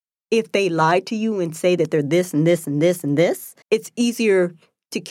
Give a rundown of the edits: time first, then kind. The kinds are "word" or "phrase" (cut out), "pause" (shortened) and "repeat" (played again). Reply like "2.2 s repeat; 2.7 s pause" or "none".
3.6 s pause